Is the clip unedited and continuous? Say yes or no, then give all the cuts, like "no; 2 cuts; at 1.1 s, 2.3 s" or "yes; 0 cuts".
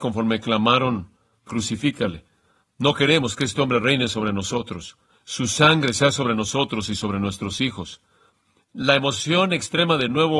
no; 1 cut; at 1.5 s